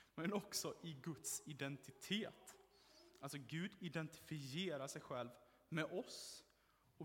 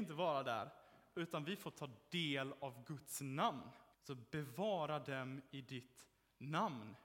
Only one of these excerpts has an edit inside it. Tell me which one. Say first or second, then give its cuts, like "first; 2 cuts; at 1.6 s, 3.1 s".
second; 1 cut; at 3.9 s